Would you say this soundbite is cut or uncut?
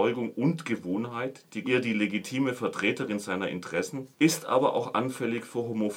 cut